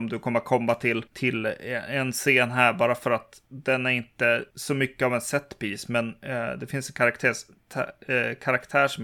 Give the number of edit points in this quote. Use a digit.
0